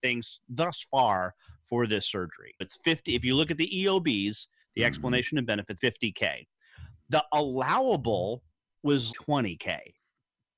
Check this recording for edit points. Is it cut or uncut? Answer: cut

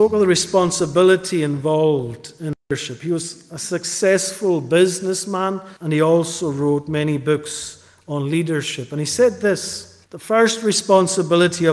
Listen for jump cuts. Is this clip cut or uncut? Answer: cut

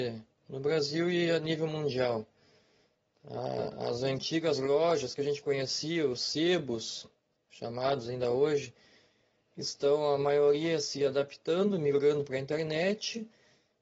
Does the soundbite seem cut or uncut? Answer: uncut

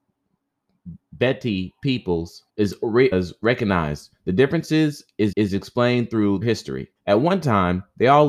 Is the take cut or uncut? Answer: cut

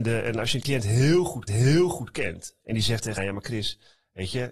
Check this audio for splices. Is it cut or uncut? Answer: cut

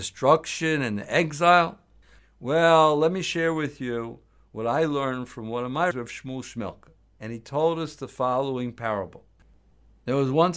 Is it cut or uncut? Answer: cut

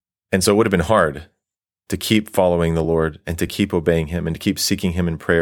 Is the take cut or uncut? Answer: uncut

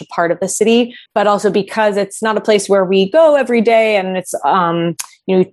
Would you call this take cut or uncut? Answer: cut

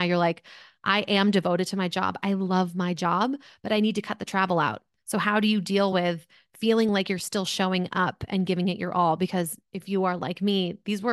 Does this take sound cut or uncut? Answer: uncut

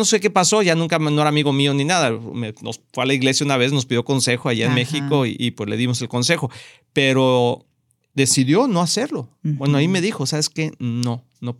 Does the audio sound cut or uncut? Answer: uncut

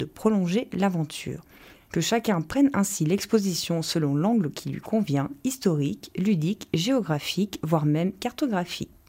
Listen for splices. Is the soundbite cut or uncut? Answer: uncut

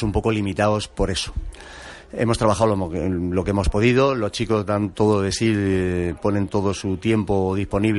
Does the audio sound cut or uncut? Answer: uncut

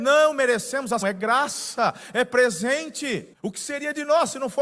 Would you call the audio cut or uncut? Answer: cut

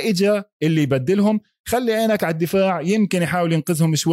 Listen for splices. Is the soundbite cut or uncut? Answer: uncut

